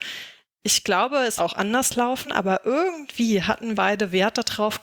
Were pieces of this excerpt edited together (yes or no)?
yes